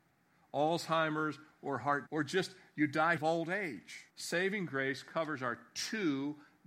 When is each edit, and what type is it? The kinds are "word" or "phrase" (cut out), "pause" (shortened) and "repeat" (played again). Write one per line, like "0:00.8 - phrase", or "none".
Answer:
0:02.1 - word
0:03.2 - word
0:04.1 - pause

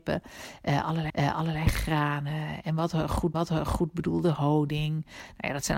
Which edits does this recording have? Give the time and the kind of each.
0:01.1 - repeat
0:03.3 - repeat

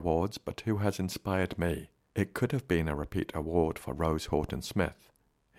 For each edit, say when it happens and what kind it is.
none

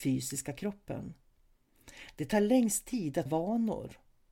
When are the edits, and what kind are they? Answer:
0:03.3 - word

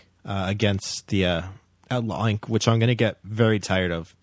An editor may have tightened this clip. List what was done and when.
none

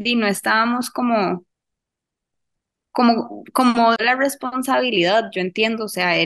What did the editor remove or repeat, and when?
0:04.0 - word

